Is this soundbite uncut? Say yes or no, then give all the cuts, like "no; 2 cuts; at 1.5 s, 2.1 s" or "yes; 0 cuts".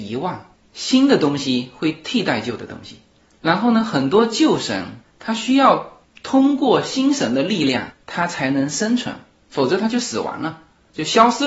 yes; 0 cuts